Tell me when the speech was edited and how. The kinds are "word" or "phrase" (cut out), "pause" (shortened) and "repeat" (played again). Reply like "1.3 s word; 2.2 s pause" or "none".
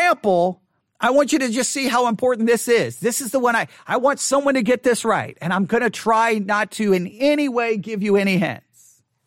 none